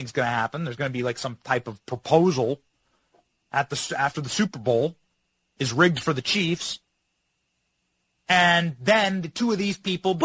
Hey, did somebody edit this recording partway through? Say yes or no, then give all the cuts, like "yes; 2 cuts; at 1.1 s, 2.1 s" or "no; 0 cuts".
no; 0 cuts